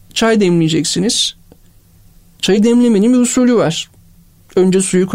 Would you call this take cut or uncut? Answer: uncut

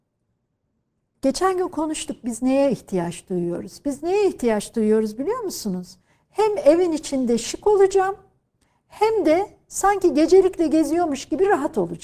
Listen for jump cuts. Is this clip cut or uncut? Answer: uncut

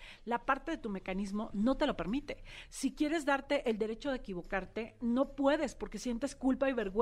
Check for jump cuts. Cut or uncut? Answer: uncut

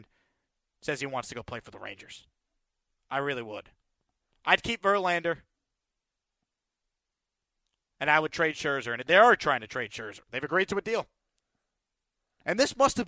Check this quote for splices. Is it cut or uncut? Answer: uncut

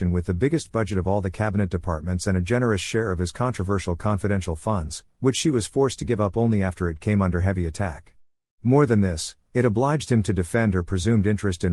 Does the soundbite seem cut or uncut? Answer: uncut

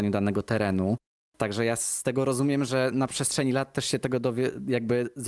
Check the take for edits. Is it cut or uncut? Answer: uncut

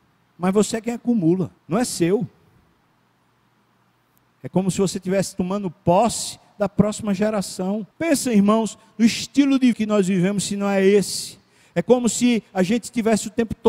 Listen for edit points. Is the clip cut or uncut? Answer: cut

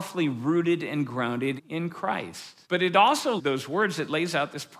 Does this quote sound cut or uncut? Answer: cut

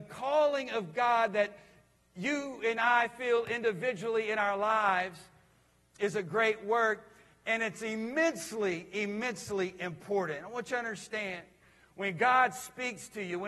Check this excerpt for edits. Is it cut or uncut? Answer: uncut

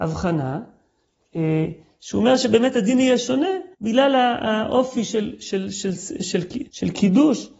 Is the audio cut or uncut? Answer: cut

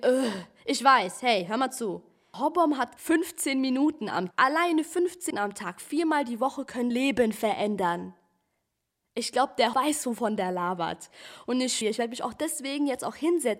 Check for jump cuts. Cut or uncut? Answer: cut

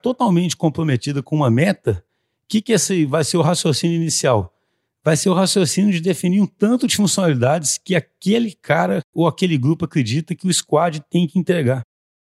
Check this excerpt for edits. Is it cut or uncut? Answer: uncut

